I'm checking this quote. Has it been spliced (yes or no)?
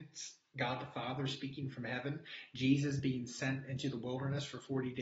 no